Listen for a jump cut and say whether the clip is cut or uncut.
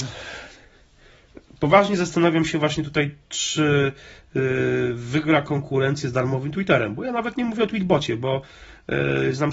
uncut